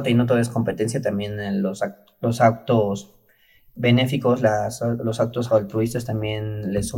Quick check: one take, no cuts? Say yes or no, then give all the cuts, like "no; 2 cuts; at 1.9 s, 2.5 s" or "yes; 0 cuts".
yes; 0 cuts